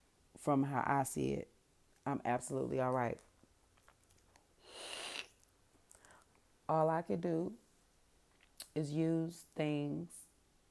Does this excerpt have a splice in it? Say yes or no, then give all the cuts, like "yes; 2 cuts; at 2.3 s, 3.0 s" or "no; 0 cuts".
no; 0 cuts